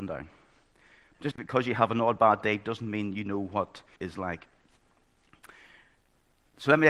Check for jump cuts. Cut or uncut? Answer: cut